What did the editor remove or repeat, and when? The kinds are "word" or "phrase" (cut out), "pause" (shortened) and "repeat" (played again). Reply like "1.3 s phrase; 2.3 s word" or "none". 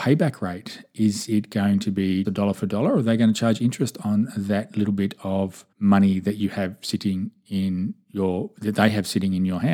2.2 s word; 5.7 s pause